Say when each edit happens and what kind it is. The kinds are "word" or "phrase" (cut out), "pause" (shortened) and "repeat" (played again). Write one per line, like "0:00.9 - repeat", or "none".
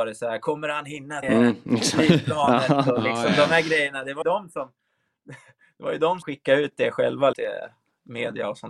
0:01.2 - word
0:04.2 - word
0:06.2 - word
0:07.3 - word